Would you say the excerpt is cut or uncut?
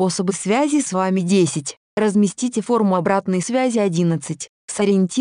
uncut